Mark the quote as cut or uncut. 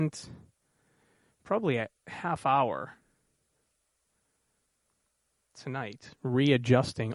uncut